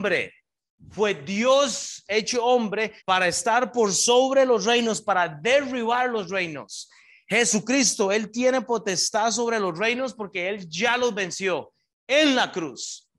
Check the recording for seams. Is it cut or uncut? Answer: cut